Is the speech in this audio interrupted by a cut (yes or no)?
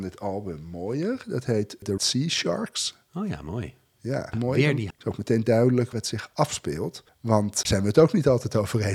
yes